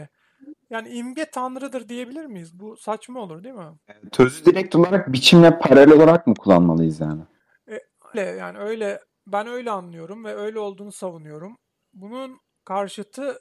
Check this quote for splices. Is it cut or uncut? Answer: cut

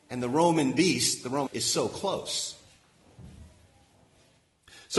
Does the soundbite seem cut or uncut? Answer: cut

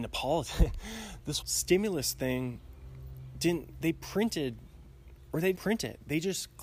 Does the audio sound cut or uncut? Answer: cut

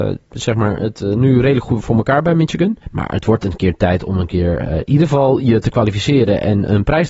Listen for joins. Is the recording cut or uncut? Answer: cut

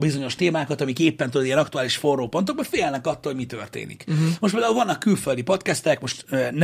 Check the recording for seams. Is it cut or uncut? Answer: uncut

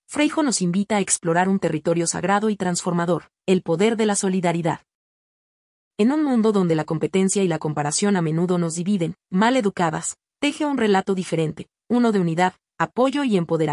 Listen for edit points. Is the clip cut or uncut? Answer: uncut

